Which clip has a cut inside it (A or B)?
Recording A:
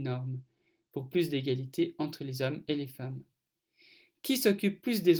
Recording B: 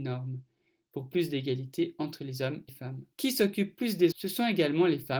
B